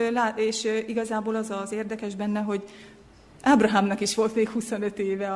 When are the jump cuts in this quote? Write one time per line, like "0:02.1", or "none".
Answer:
none